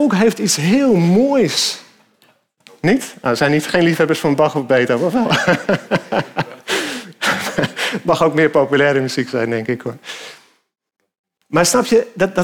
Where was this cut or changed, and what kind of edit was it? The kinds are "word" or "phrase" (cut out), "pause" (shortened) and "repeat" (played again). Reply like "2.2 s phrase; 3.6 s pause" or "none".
none